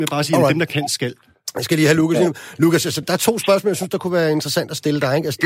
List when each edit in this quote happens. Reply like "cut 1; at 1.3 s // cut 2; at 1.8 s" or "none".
cut 1; at 3.0 s

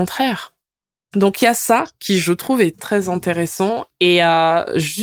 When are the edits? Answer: cut 1; at 2.8 s

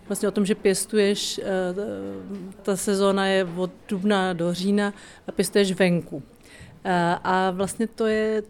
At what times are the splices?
cut 1; at 2.6 s

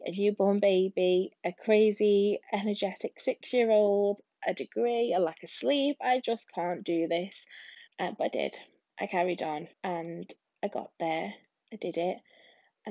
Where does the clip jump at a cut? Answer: cut 1; at 7.9 s // cut 2; at 9.7 s

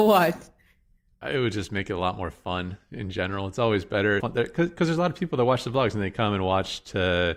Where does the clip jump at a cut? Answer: cut 1; at 4.2 s

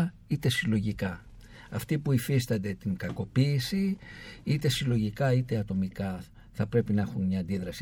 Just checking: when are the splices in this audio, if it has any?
none

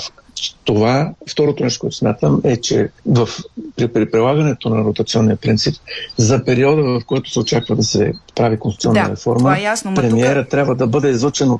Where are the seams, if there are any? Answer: cut 1; at 3.0 s

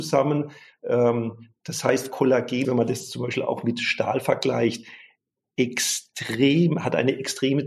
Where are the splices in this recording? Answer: cut 1; at 2.6 s

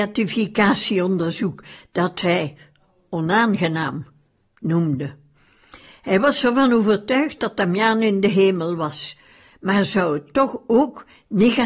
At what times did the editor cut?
none

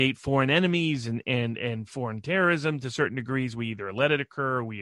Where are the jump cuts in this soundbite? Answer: none

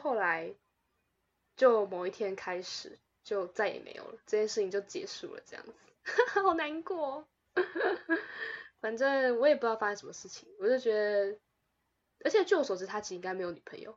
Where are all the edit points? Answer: none

